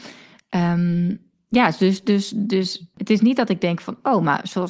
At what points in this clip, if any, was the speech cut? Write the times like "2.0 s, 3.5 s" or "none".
2.9 s

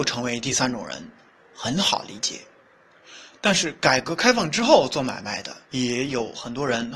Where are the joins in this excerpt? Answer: 5.6 s

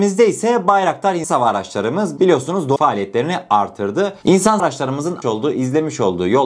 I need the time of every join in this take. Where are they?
1.2 s, 2.8 s, 4.6 s, 5.2 s

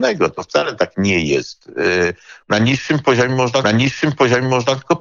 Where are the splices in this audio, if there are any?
2.4 s, 3.6 s

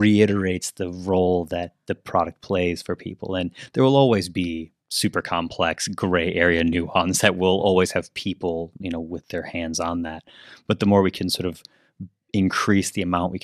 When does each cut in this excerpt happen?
4.8 s

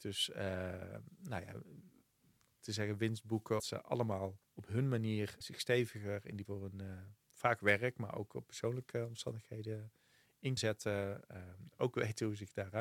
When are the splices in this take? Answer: 2.6 s, 3.6 s, 4.4 s, 5.4 s, 6.4 s, 7.2 s, 10.6 s

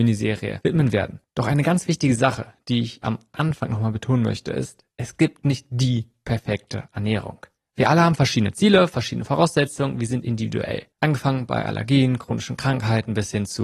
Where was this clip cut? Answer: 7.6 s, 10.9 s

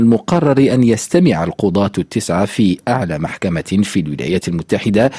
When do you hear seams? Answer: none

